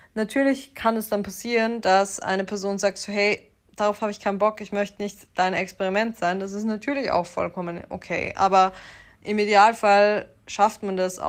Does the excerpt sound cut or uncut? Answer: uncut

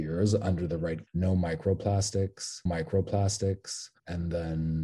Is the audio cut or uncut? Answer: cut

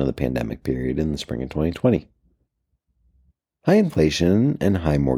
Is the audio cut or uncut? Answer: uncut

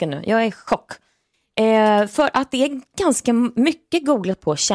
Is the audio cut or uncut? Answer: uncut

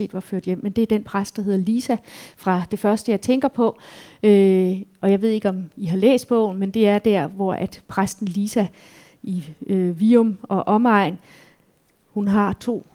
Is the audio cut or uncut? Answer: uncut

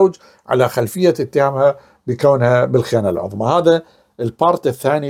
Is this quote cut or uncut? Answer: uncut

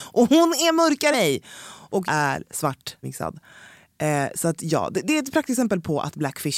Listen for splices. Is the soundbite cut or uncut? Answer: cut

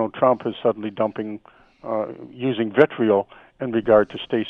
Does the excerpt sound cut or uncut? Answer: uncut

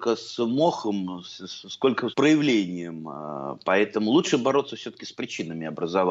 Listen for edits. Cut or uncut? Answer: cut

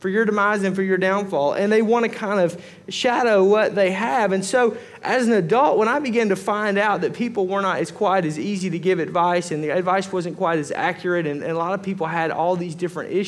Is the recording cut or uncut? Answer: uncut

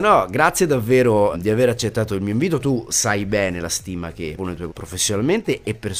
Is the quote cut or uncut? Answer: cut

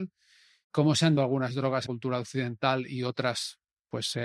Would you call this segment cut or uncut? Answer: cut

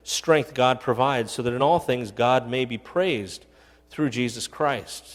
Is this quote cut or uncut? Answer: uncut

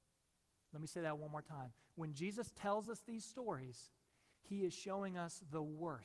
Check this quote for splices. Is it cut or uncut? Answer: uncut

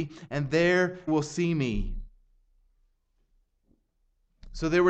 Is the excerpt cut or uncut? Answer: cut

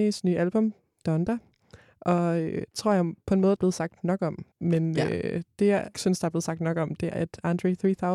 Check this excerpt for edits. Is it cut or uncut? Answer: cut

